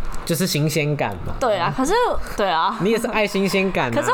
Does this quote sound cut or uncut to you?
uncut